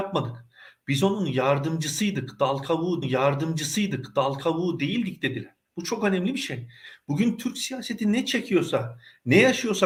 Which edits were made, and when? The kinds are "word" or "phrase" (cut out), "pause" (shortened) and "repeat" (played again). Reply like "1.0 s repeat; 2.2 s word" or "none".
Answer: 3.0 s repeat; 5.6 s pause